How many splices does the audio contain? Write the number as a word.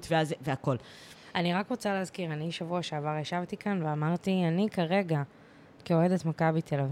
zero